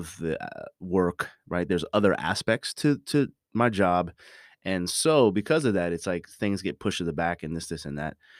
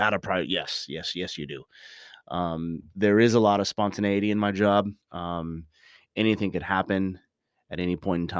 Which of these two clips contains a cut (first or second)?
second